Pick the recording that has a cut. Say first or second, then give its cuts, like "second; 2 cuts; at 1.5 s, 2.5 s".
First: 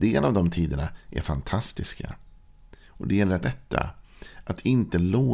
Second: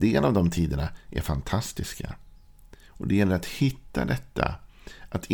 first; 1 cut; at 3.4 s